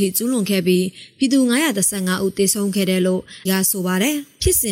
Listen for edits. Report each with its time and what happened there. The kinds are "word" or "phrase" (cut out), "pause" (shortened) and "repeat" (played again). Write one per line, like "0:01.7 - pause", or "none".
0:03.5 - word